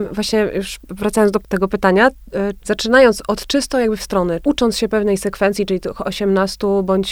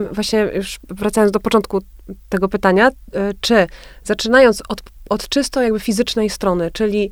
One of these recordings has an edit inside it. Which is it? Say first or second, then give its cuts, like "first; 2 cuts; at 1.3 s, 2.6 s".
first; 5 cuts; at 1.4 s, 2.6 s, 3.3 s, 4.0 s, 4.4 s